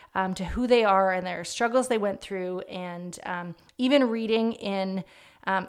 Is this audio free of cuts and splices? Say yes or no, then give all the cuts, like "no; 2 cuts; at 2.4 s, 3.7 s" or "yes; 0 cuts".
yes; 0 cuts